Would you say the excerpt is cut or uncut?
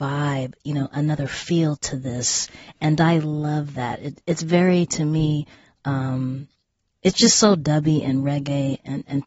uncut